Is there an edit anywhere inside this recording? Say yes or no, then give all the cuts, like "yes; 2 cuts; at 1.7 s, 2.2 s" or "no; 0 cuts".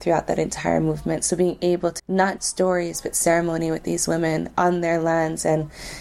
yes; 2 cuts; at 2.0 s, 2.4 s